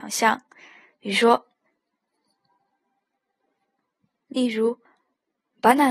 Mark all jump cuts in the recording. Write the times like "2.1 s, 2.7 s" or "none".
4.8 s